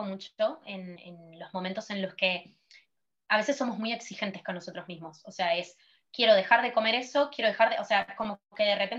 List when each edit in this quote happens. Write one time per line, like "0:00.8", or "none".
0:01.0

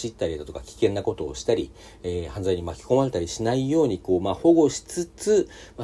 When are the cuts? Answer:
none

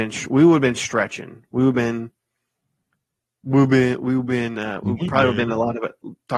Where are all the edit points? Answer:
none

